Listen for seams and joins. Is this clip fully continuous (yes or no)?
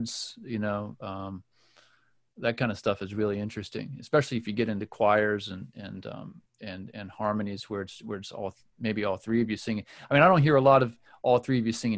yes